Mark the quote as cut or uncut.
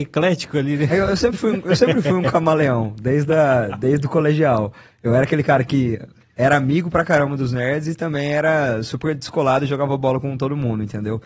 uncut